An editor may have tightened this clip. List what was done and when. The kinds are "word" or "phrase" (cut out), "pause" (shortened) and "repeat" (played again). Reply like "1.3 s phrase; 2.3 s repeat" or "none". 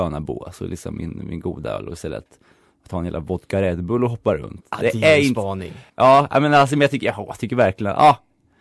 1.2 s word; 5.9 s pause